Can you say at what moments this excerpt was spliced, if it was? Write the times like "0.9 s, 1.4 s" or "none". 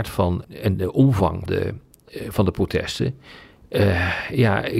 1.5 s